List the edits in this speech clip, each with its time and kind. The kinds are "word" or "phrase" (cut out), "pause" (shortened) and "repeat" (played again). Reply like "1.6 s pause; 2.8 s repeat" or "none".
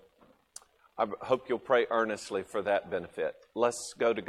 none